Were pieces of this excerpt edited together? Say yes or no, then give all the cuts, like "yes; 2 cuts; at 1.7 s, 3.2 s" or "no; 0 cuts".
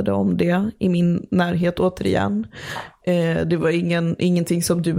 no; 0 cuts